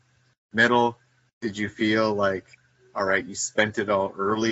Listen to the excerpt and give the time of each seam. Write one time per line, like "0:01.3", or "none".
none

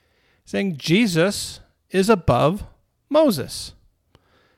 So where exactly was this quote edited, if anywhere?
none

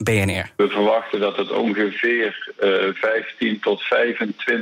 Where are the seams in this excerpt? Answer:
none

